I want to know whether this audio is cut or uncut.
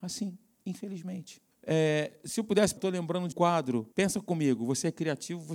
cut